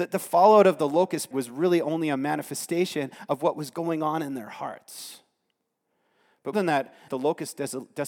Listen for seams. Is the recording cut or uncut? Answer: cut